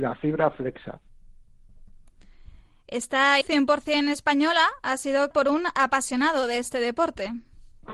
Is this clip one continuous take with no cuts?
no; 2 cuts; at 3.4 s, 5.3 s

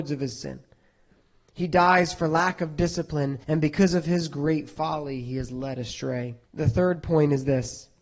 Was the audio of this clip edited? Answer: yes; 2 cuts; at 3.4 s, 6.4 s

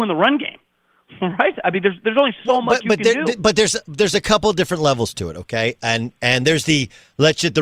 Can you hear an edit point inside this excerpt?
no; 0 cuts

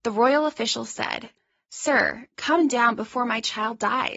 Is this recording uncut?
yes; 0 cuts

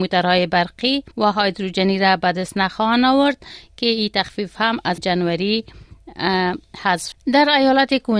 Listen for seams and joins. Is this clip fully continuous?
no; 3 cuts; at 1.1 s, 5.0 s, 7.1 s

